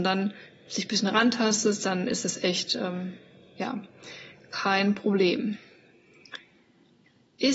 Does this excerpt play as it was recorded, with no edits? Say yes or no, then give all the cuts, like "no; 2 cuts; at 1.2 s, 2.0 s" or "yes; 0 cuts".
yes; 0 cuts